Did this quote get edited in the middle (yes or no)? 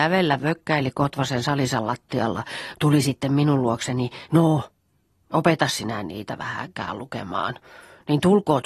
yes